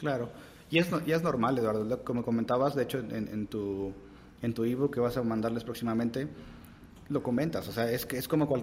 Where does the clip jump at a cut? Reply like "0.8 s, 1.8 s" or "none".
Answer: none